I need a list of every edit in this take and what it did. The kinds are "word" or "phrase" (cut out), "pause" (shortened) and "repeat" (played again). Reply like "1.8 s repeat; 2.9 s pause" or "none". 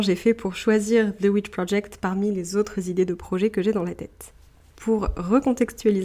none